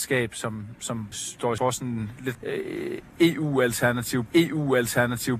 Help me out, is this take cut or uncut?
cut